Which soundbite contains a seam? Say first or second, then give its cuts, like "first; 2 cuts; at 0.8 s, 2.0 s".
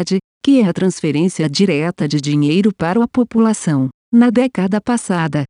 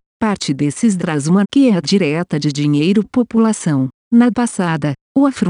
second; 5 cuts; at 1.0 s, 1.4 s, 1.8 s, 3.0 s, 4.3 s